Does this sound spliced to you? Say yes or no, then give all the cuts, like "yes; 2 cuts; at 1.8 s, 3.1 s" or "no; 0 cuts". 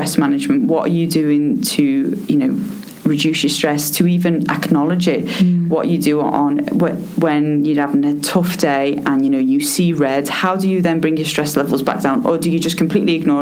no; 0 cuts